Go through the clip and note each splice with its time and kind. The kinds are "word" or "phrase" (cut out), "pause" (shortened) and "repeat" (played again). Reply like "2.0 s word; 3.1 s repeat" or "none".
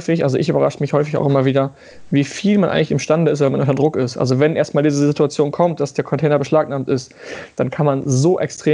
none